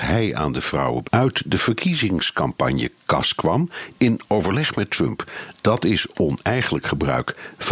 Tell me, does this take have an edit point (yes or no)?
yes